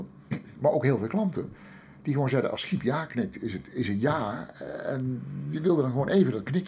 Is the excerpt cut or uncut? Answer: uncut